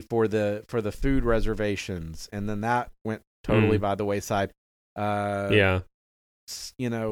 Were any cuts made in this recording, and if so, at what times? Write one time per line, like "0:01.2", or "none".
none